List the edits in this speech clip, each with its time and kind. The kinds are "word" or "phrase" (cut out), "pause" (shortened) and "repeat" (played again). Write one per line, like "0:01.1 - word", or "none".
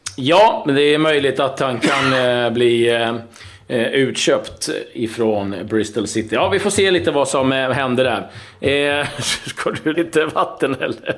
0:09.9 - word